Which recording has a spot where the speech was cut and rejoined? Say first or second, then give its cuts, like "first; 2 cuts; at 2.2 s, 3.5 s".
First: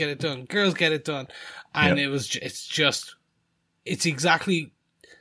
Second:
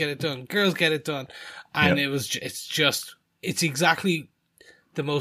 second; 1 cut; at 3.2 s